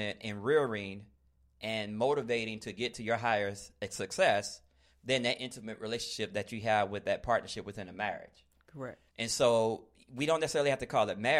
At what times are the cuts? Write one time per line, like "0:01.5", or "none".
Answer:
0:09.1